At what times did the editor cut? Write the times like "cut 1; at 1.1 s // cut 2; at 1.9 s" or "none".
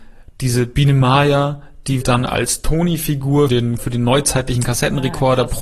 cut 1; at 2.0 s // cut 2; at 3.5 s // cut 3; at 3.8 s

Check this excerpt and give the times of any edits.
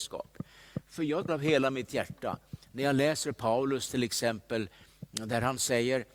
cut 1; at 1.3 s

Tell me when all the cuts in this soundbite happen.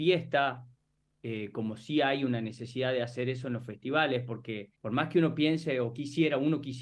cut 1; at 4.8 s

